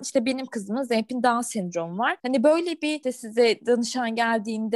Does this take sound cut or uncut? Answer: uncut